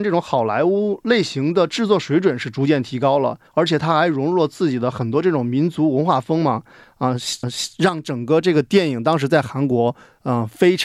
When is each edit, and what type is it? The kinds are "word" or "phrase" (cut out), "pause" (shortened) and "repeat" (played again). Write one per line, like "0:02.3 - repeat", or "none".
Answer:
0:03.5 - pause
0:07.4 - repeat